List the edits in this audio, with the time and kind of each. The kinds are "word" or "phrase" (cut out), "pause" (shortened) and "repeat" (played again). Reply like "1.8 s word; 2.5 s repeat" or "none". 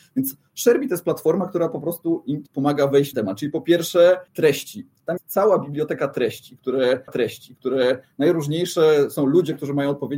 2.5 s phrase; 3.1 s word; 4.3 s pause; 5.2 s word; 7.1 s repeat